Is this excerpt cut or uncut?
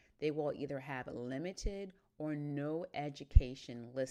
uncut